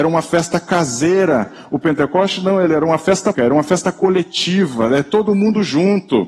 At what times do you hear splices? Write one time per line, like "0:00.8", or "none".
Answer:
0:03.3